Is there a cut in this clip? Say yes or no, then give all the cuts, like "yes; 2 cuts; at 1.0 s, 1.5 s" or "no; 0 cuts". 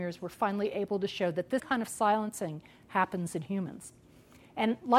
yes; 1 cut; at 1.6 s